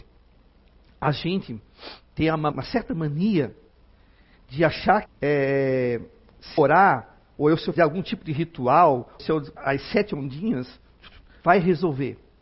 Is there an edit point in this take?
yes; 7 cuts; at 2.5 s, 5.1 s, 6.6 s, 7.8 s, 9.2 s, 9.6 s, 11.4 s

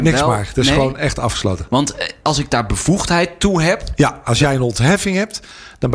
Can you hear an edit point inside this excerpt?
no; 0 cuts

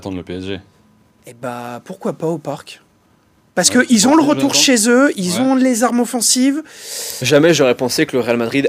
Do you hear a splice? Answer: no; 0 cuts

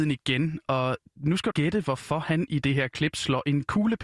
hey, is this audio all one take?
no; 1 cut; at 1.5 s

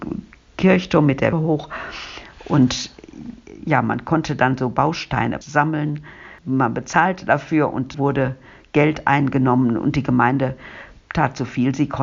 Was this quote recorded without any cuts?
no; 3 cuts; at 1.3 s, 5.4 s, 7.9 s

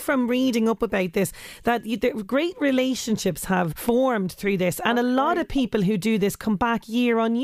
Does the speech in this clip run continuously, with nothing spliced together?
no; 1 cut; at 3.7 s

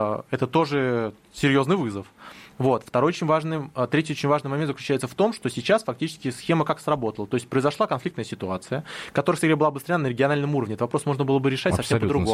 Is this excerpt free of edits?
yes; 0 cuts

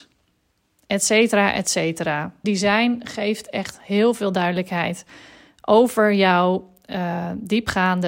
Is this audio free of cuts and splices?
no; 1 cut; at 2.4 s

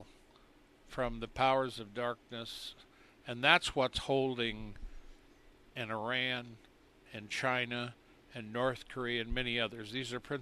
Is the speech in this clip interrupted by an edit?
yes; 1 cut; at 5.7 s

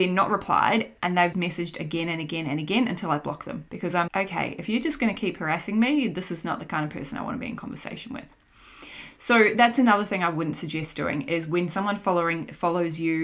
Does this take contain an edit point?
yes; 3 cuts; at 1.3 s, 3.7 s, 4.1 s

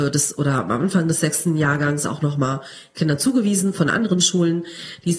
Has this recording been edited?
no; 0 cuts

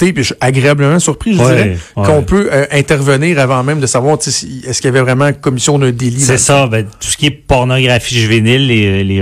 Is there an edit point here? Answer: no; 0 cuts

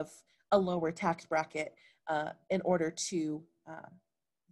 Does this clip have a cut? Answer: no; 0 cuts

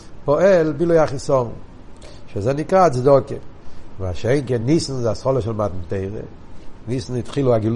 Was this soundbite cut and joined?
no; 0 cuts

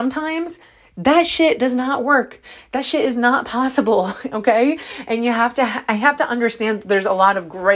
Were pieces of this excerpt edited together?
no; 0 cuts

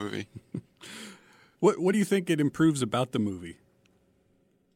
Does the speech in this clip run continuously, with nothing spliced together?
yes; 0 cuts

